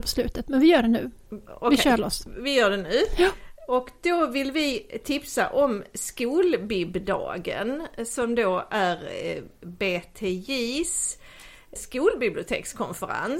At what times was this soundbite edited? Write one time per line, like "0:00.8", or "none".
0:11.8